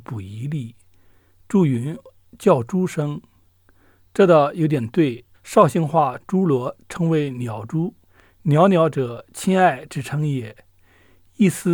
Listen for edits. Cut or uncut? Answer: cut